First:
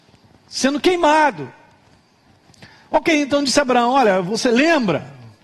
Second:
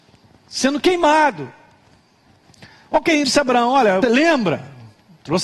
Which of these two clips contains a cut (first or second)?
second